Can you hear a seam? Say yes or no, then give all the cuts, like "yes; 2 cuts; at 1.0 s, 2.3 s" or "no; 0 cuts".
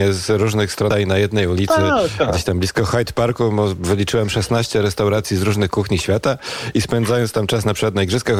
yes; 1 cut; at 0.9 s